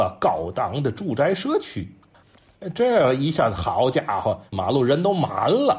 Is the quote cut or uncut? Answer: cut